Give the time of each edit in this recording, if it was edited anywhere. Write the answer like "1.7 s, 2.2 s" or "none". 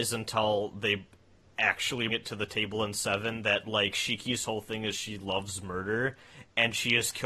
2.1 s